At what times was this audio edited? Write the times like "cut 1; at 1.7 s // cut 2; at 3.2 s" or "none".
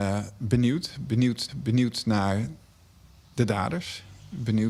cut 1; at 1.5 s